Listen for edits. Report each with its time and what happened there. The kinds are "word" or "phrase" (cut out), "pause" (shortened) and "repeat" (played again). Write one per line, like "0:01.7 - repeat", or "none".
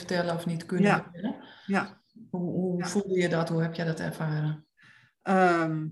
none